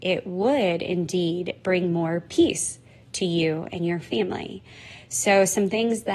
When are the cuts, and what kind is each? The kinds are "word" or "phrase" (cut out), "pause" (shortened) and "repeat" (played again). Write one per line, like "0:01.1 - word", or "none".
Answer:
none